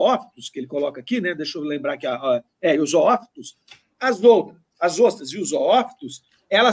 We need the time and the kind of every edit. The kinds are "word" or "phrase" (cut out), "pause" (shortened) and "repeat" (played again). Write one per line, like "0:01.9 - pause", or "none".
none